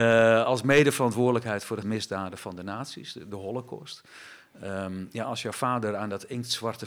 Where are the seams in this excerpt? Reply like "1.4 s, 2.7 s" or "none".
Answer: 1.8 s